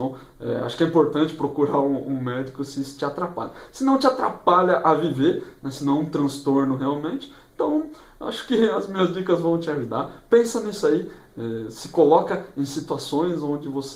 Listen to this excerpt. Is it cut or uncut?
uncut